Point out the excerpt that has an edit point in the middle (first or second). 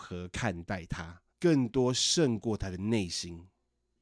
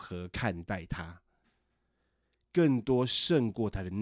first